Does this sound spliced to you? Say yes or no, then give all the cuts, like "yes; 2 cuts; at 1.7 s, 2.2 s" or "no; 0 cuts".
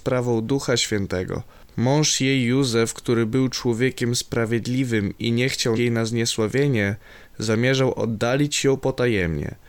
yes; 1 cut; at 5.8 s